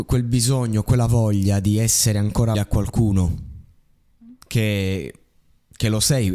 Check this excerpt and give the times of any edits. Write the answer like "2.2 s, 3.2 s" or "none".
2.5 s